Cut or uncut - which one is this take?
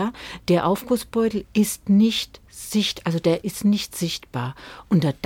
cut